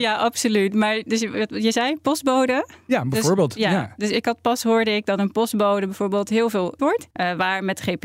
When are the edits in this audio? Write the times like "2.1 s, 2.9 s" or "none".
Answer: 6.8 s, 7.1 s